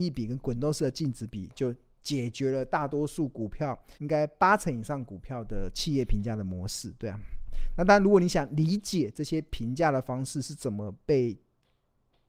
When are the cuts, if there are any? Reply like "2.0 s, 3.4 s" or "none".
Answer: 3.9 s